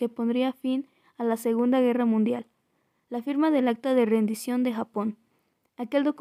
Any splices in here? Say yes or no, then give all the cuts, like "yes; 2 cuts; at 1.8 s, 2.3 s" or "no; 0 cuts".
no; 0 cuts